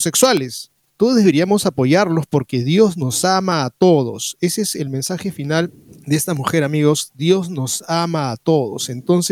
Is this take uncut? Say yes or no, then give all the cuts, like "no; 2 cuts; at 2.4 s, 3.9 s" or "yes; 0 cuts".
no; 1 cut; at 5.9 s